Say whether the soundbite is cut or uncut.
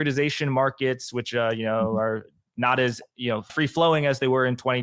cut